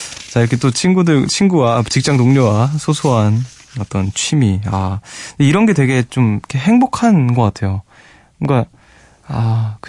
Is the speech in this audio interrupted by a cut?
no; 0 cuts

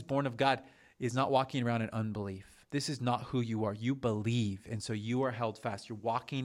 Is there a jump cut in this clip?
yes; 1 cut; at 2.6 s

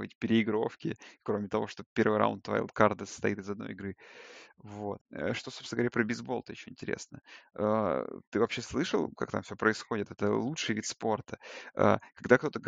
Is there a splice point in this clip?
yes; 1 cut; at 5.0 s

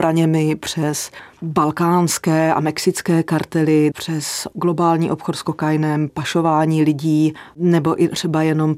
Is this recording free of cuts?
no; 2 cuts; at 3.9 s, 6.1 s

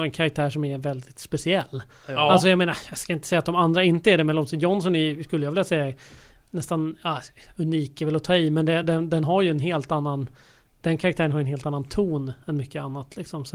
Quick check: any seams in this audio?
no; 0 cuts

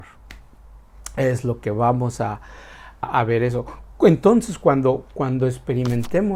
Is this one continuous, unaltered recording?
no; 1 cut; at 3.0 s

